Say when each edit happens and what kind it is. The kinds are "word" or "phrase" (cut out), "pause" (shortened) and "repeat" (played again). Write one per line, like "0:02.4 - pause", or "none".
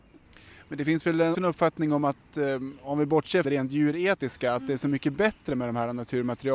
0:01.3 - word
0:03.4 - word